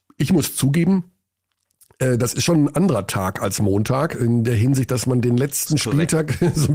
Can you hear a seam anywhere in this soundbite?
no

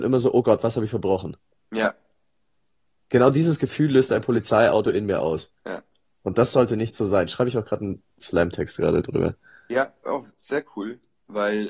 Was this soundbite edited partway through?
no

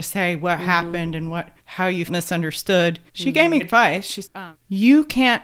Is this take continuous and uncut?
no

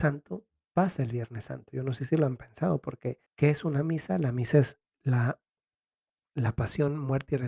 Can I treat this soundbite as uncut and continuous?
no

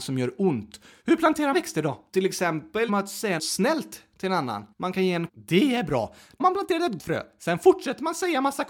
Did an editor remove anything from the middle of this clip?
yes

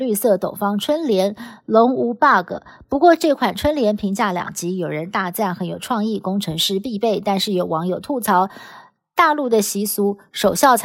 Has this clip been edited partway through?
no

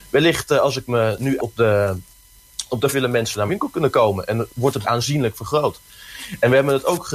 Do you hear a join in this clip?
yes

